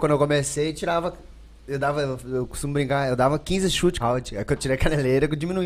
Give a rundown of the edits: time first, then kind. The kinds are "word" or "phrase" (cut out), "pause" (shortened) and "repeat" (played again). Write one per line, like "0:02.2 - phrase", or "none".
0:04.0 - word